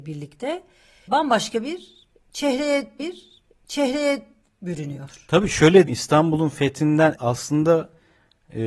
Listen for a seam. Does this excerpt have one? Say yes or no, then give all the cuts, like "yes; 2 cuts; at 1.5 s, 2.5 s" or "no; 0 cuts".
yes; 4 cuts; at 1.1 s, 3.0 s, 5.9 s, 7.2 s